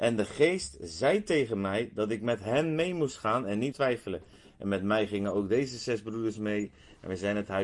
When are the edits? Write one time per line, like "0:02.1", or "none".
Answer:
0:03.7